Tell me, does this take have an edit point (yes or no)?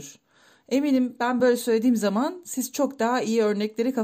no